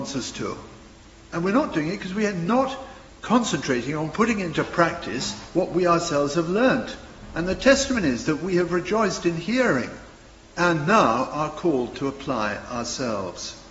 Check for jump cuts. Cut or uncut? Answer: uncut